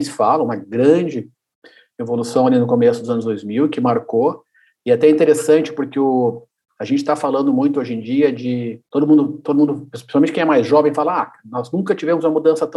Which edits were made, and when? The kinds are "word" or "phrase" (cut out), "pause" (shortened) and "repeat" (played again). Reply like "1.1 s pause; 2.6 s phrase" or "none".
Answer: 8.9 s pause

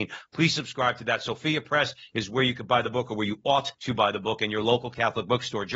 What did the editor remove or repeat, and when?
3.7 s pause

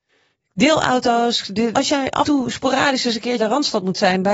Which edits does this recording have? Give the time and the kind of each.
1.7 s word; 2.2 s word; 3.4 s word

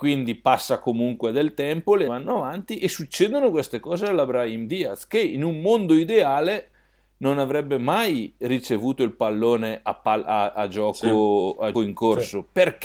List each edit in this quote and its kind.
2.1 s word; 11.7 s word

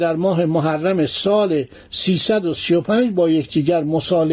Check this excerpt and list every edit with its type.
none

